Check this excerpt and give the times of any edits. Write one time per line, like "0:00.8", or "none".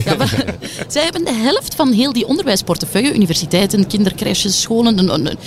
none